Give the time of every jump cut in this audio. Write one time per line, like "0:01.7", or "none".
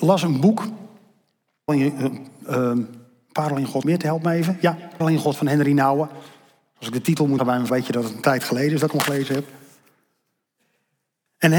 0:01.7
0:03.8
0:05.0
0:05.3
0:07.4
0:07.7